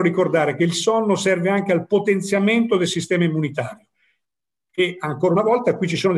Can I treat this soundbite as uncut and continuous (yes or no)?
yes